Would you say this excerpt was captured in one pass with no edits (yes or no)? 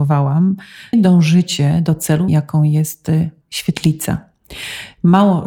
no